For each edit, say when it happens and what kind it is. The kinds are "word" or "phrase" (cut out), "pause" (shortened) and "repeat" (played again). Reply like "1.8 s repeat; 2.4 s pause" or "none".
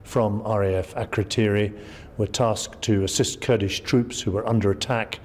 none